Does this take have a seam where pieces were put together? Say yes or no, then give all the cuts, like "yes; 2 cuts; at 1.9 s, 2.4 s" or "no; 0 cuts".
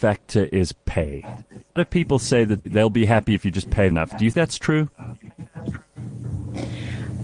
yes; 4 cuts; at 1.8 s, 2.6 s, 3.9 s, 4.3 s